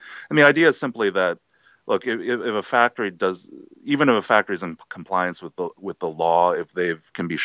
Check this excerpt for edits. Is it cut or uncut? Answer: uncut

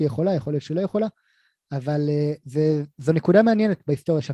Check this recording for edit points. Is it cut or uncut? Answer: uncut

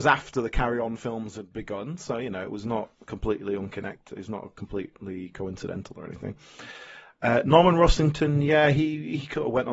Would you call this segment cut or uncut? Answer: uncut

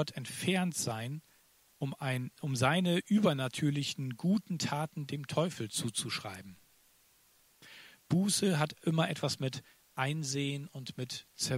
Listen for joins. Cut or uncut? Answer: uncut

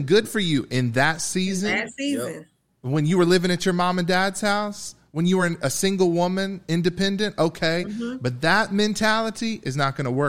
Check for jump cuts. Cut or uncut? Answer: uncut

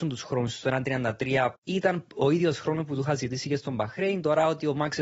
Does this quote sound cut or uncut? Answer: cut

